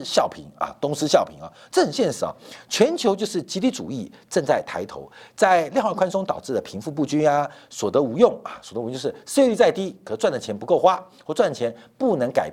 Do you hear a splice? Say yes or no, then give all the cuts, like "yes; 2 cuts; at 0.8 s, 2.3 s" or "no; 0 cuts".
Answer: no; 0 cuts